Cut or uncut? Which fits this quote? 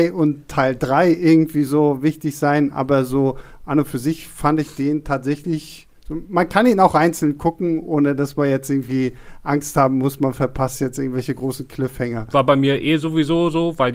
uncut